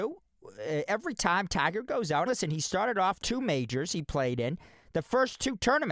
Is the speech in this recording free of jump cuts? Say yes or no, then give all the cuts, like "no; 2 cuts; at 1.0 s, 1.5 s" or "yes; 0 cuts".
no; 2 cuts; at 2.3 s, 3.2 s